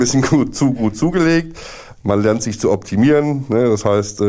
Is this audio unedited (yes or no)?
no